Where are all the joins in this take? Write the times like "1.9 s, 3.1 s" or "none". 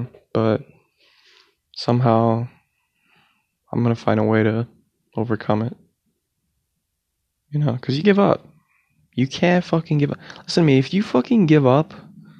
8.0 s